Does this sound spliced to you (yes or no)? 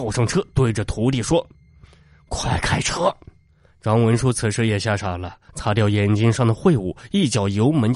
no